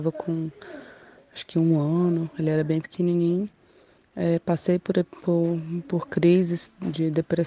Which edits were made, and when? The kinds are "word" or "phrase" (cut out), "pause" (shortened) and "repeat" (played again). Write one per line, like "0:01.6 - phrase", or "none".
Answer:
none